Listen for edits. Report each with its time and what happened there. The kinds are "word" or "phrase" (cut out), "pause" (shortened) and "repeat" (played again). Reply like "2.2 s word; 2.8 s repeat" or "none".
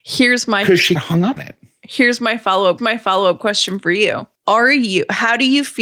1.0 s phrase; 1.4 s word; 2.8 s repeat; 4.3 s pause